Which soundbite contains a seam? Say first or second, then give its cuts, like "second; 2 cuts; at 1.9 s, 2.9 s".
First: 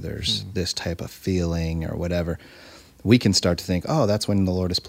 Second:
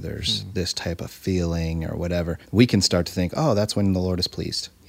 second; 1 cut; at 2.4 s